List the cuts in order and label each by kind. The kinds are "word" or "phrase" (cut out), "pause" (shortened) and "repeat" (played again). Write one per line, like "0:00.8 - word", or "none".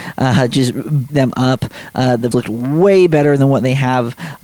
0:01.1 - word
0:02.3 - word